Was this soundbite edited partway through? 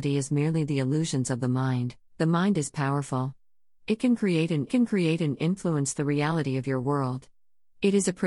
yes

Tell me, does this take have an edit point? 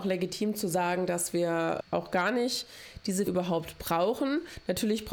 yes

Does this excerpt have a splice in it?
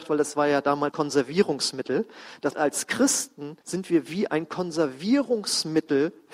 yes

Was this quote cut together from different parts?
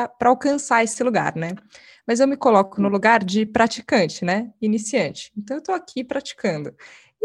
no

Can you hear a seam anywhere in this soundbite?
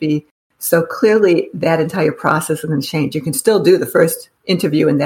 no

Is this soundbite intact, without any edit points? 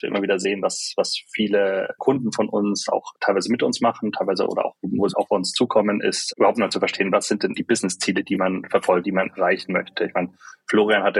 no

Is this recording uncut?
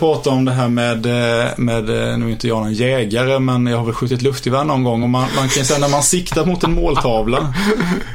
yes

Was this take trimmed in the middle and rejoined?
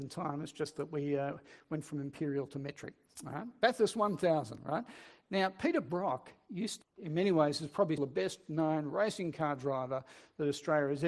yes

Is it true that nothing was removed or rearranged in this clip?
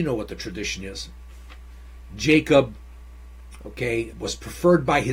no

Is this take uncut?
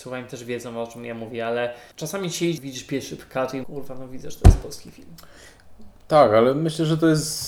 no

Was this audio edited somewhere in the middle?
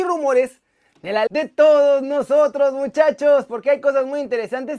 yes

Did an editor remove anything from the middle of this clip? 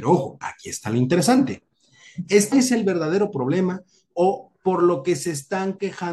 yes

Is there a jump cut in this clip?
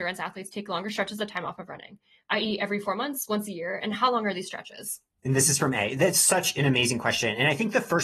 no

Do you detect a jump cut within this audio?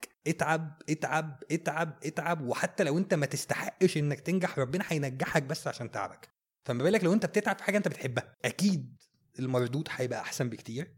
no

